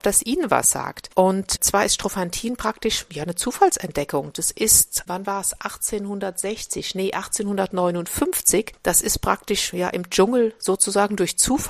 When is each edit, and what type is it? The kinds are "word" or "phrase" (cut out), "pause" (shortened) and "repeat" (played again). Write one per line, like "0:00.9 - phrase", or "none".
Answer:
0:01.1 - pause